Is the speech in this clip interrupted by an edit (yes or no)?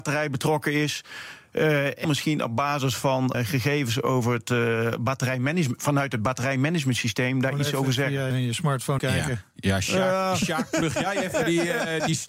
yes